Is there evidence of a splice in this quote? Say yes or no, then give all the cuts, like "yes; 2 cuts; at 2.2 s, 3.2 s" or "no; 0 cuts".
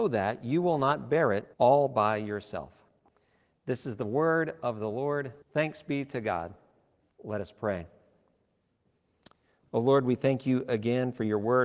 yes; 2 cuts; at 1.5 s, 5.4 s